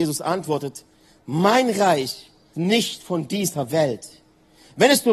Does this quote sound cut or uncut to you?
cut